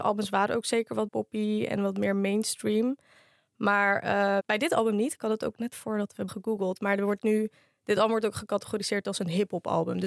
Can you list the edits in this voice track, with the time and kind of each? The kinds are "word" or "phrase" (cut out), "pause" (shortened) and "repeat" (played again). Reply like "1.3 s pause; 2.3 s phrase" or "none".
1.1 s word; 4.4 s word; 5.7 s word; 6.3 s word